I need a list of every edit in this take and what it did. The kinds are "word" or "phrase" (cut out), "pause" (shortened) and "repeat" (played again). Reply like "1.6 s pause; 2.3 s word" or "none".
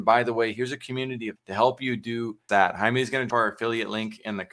1.4 s word; 2.5 s word; 3.3 s word